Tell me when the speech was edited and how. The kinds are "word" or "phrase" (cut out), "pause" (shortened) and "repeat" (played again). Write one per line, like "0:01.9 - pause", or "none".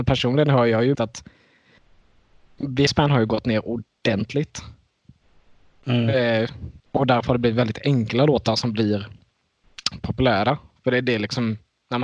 0:00.9 - word
0:02.9 - phrase
0:06.8 - pause